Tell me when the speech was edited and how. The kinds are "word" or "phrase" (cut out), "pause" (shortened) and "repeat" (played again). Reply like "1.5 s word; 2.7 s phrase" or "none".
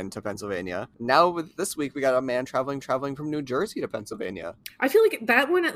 2.8 s repeat